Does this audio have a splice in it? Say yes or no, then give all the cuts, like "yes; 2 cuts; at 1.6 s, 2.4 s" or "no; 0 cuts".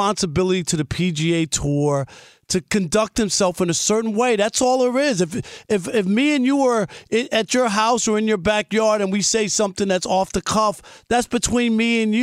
no; 0 cuts